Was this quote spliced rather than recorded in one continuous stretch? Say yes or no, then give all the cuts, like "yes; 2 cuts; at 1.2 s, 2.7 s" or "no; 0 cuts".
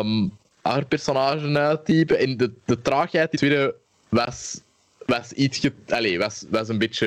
yes; 1 cut; at 3.3 s